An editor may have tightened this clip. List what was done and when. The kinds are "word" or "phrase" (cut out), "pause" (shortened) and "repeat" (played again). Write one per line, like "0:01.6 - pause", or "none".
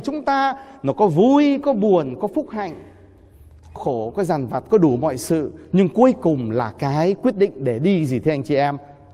0:03.8 - word